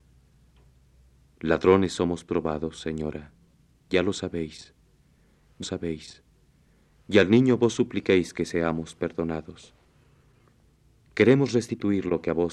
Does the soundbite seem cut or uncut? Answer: cut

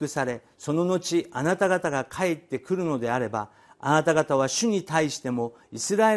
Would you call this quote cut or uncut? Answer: uncut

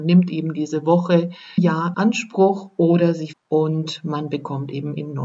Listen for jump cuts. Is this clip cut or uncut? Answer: cut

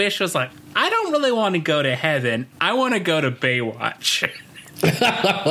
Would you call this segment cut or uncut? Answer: uncut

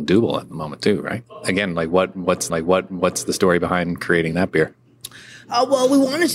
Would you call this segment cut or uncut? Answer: cut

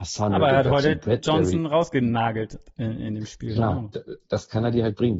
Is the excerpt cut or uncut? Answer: uncut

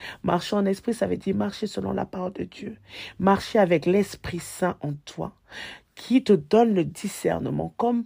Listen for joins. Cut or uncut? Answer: uncut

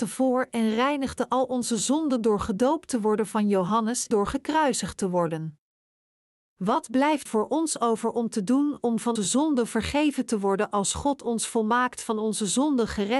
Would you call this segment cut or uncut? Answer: cut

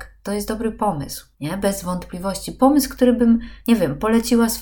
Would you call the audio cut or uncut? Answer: cut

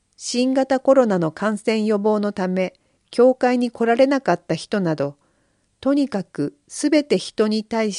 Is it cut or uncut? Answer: uncut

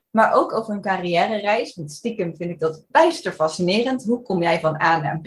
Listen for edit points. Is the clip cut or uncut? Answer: cut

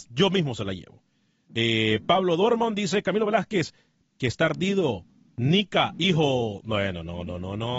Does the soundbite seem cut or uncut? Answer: uncut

